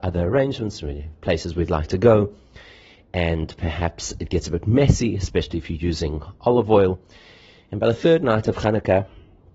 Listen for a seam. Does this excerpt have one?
no; 0 cuts

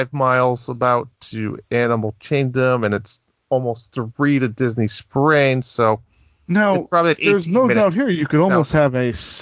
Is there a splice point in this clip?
no; 0 cuts

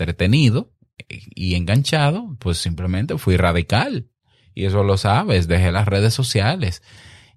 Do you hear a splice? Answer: no; 0 cuts

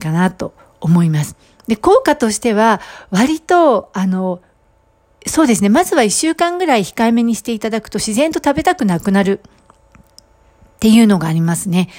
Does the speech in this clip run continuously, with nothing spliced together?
yes; 0 cuts

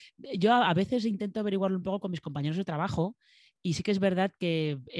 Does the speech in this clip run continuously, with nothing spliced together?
yes; 0 cuts

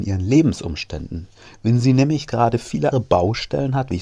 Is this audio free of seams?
no; 1 cut; at 2.9 s

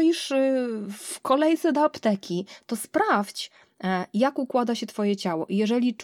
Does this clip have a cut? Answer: no; 0 cuts

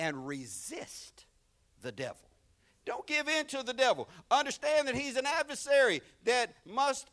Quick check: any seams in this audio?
no; 0 cuts

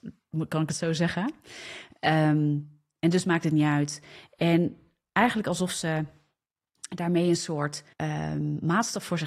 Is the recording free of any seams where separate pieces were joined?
no; 1 cut; at 7.9 s

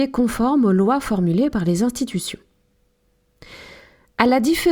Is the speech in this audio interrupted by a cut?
no; 0 cuts

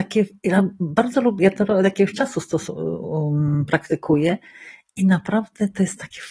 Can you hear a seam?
no; 0 cuts

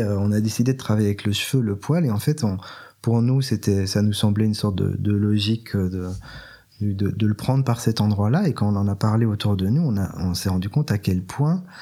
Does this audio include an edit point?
no; 0 cuts

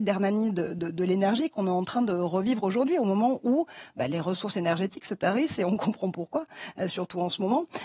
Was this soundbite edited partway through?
yes; 1 cut; at 6.9 s

